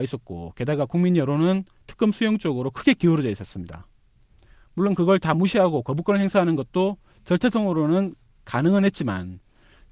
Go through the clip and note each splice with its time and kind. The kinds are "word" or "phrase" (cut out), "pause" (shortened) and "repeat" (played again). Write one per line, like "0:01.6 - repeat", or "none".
none